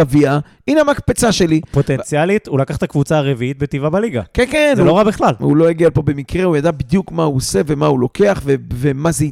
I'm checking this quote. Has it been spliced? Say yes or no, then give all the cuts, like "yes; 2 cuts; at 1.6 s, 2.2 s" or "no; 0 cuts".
no; 0 cuts